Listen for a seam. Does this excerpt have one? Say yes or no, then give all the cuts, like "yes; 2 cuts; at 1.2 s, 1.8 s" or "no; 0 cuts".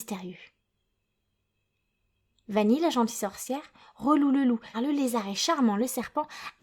yes; 1 cut; at 4.7 s